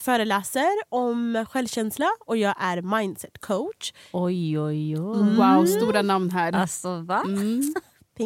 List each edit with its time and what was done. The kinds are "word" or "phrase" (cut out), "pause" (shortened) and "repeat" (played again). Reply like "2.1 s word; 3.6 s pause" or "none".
none